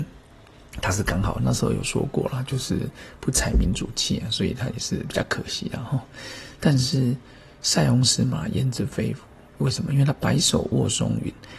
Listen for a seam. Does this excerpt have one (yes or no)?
no